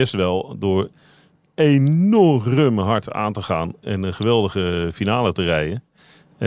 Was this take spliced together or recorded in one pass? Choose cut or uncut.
uncut